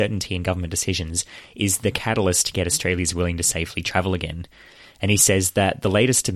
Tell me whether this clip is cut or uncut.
uncut